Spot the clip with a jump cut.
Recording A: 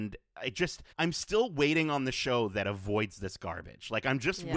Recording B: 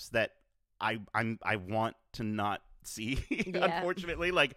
A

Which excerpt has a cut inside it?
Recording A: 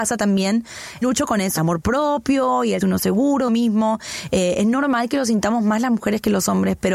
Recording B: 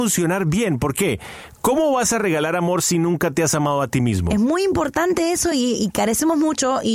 A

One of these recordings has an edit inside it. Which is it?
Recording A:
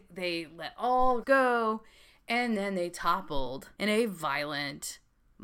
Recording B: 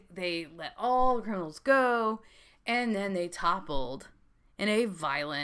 A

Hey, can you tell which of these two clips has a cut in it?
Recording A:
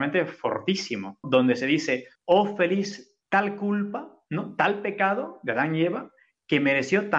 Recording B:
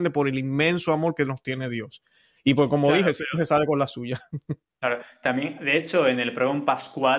A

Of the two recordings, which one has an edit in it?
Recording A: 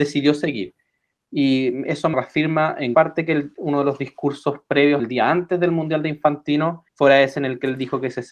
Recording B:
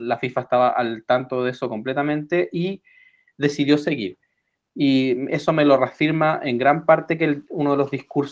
A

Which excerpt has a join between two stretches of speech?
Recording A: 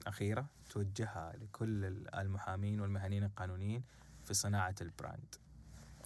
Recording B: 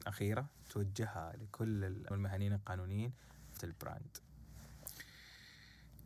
B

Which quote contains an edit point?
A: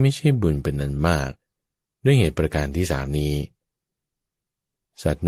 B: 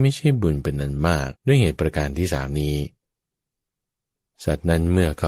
B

